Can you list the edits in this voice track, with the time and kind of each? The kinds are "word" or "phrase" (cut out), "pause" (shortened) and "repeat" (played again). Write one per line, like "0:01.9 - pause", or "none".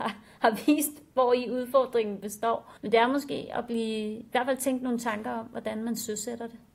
0:02.8 - pause